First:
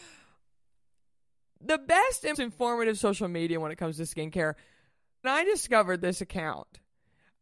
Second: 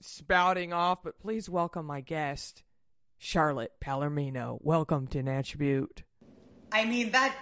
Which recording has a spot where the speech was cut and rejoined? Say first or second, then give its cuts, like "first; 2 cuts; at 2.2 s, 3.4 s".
first; 2 cuts; at 2.3 s, 5.2 s